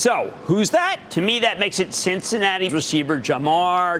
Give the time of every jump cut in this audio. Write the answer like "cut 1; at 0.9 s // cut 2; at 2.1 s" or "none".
cut 1; at 2.7 s